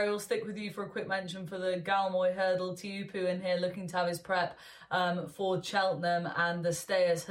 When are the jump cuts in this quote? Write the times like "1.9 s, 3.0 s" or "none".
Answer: none